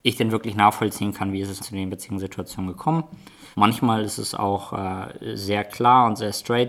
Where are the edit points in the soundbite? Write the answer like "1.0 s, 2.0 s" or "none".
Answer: 1.6 s, 3.5 s